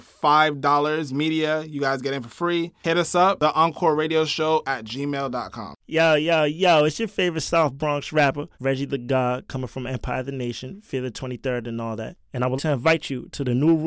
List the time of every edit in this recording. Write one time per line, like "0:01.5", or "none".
0:02.8
0:05.8
0:08.5
0:12.6